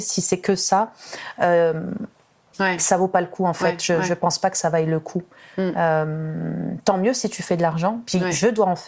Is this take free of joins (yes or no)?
yes